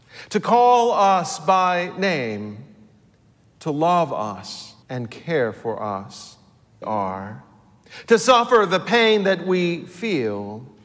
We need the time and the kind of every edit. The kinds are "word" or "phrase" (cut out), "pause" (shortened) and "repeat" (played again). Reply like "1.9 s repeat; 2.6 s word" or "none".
4.8 s pause; 6.8 s phrase